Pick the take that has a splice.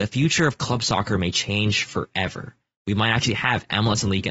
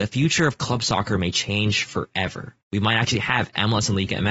second; 1 cut; at 2.6 s

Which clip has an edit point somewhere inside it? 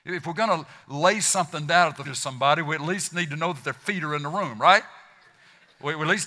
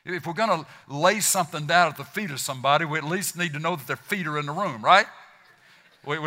first; 1 cut; at 2.1 s

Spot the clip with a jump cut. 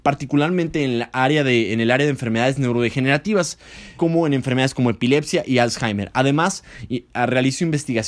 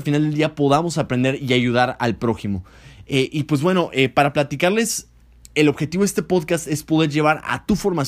first; 1 cut; at 4.0 s

